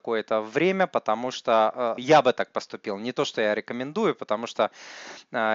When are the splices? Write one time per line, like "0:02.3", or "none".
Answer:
0:02.0